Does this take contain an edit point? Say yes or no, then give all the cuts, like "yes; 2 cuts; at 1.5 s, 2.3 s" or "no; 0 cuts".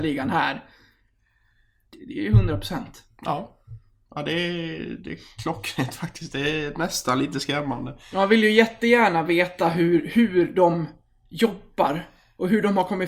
no; 0 cuts